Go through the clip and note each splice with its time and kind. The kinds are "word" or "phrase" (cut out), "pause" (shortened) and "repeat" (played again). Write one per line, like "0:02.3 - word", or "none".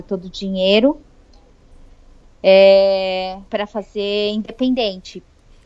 0:03.5 - pause